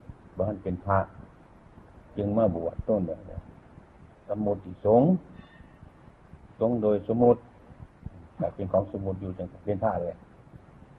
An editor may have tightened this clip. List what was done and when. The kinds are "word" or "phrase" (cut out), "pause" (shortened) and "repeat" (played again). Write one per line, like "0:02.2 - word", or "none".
0:02.1 - pause